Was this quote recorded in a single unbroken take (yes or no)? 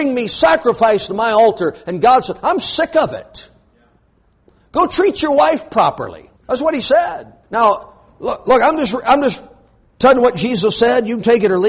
no